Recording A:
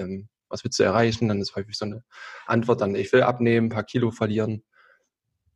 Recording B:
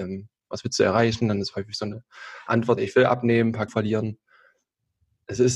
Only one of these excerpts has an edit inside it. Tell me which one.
B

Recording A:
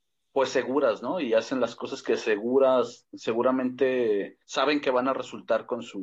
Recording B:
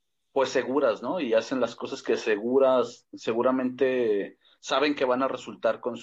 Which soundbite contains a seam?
A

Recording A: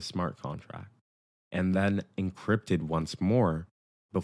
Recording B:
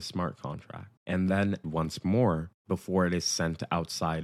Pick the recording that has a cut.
B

